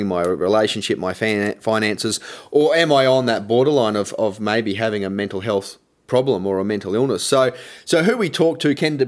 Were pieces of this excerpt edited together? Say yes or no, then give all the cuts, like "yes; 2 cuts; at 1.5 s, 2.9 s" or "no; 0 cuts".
no; 0 cuts